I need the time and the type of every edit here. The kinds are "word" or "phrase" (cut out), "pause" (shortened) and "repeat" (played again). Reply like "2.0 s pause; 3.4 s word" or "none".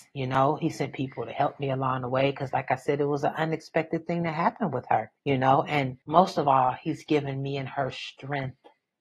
5.2 s pause; 6.0 s pause